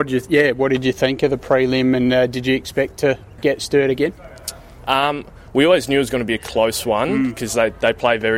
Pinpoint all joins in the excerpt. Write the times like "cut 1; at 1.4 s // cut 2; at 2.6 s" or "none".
none

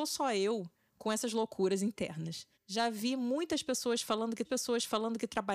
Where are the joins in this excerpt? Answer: cut 1; at 2.5 s // cut 2; at 4.4 s

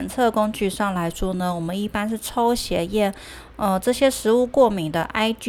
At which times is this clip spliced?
cut 1; at 3.5 s

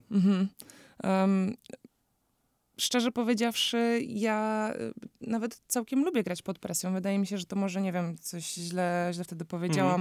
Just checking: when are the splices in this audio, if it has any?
none

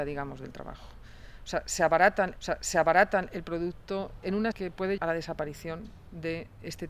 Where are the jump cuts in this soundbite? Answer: cut 1; at 2.4 s // cut 2; at 4.5 s // cut 3; at 5.0 s

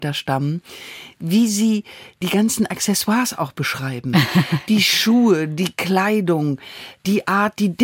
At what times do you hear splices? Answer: none

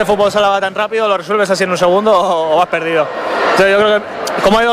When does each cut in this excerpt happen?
none

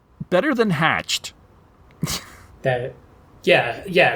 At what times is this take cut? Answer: none

